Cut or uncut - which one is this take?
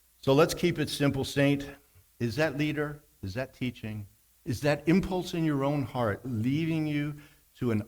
cut